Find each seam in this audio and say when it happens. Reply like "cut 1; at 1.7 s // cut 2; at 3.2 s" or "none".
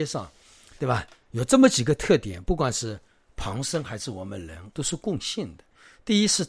cut 1; at 4.7 s